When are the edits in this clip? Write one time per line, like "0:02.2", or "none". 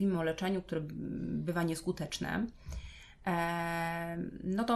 none